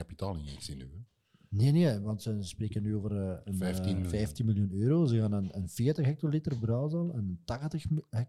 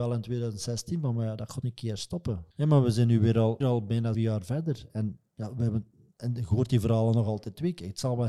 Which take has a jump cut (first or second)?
second